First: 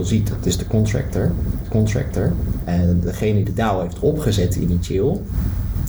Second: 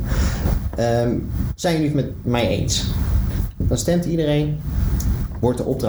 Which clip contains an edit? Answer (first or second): first